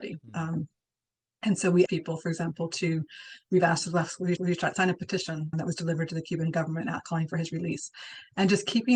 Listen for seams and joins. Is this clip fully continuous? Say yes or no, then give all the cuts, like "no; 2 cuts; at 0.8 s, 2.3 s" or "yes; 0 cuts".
no; 3 cuts; at 1.9 s, 4.4 s, 5.5 s